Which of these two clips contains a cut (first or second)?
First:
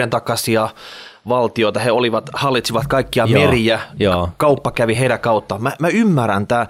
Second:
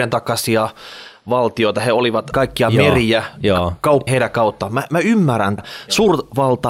second